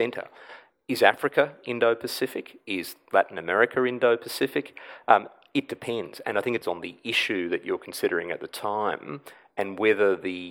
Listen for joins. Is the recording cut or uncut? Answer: cut